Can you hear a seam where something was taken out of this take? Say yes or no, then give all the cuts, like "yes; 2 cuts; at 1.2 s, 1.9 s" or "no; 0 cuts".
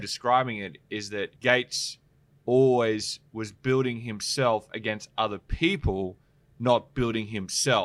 yes; 2 cuts; at 1.4 s, 3.3 s